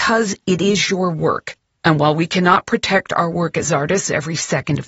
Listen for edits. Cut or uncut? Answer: uncut